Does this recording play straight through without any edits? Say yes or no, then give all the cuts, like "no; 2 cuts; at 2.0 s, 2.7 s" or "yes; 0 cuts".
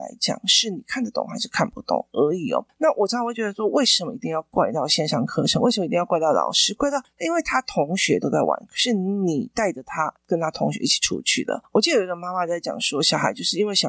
no; 1 cut; at 10.2 s